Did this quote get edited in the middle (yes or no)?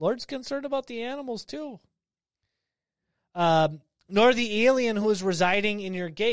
no